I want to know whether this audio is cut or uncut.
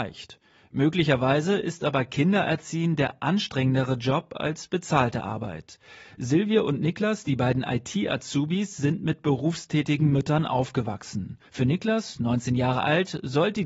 cut